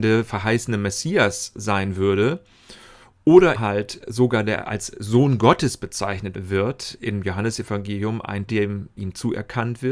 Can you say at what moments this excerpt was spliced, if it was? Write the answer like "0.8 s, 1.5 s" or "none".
3.6 s, 8.5 s, 9.0 s